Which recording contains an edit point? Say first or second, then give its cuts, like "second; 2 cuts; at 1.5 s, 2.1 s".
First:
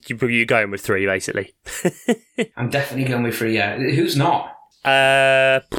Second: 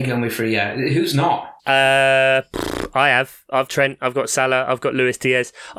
second; 2 cuts; at 1.6 s, 3.7 s